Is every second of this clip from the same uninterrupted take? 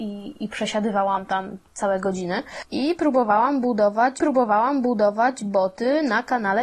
no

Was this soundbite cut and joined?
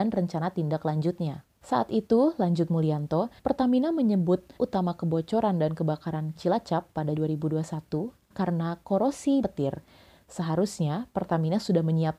yes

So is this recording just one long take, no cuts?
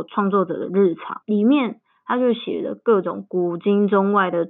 no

